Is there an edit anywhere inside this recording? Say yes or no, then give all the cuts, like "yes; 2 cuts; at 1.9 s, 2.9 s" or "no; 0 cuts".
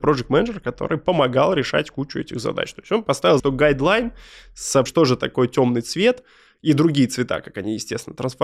yes; 2 cuts; at 3.4 s, 4.9 s